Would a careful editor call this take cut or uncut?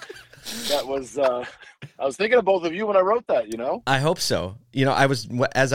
cut